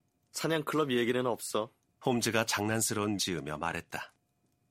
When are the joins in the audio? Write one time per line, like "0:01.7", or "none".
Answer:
0:01.8
0:03.2